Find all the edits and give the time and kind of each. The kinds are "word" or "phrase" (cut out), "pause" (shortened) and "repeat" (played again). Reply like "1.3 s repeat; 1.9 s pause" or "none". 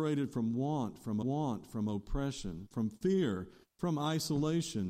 1.2 s repeat

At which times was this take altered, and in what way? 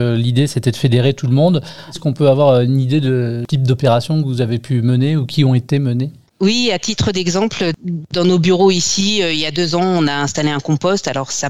none

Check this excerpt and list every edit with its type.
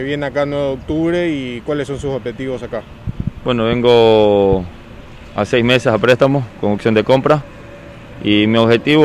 none

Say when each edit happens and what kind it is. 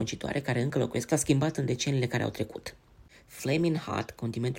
1.1 s phrase

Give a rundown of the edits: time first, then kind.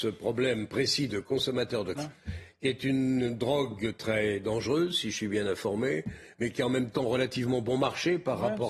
2.0 s word

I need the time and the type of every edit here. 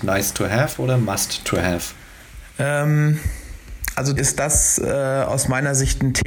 4.2 s word

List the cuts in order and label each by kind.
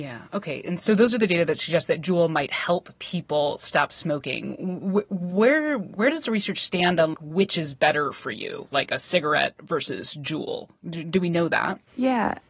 7.1 s word

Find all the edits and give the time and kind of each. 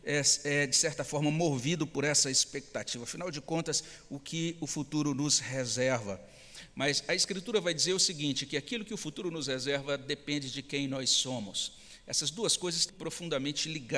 12.9 s word

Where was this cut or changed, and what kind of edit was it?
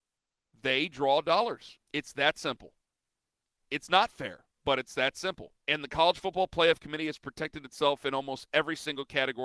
1.8 s pause; 4.5 s pause; 5.6 s pause

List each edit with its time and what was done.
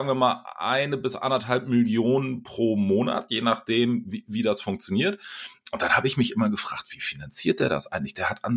none

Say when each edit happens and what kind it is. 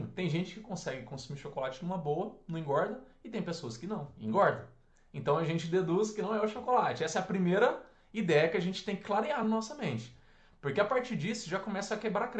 none

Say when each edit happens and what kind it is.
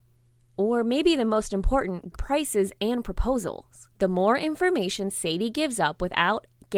2.1 s word; 3.9 s pause

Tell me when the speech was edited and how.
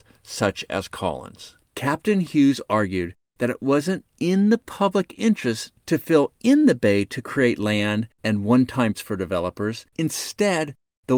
1.6 s pause; 8.1 s pause; 8.9 s word; 9.9 s pause

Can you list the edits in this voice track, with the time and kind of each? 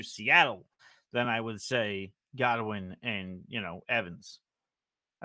none

